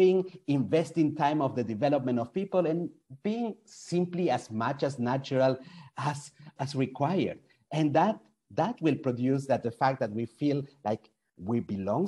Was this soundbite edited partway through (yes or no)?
yes